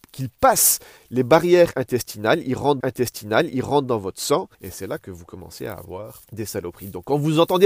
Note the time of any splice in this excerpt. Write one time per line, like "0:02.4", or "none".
0:02.8
0:04.5
0:06.2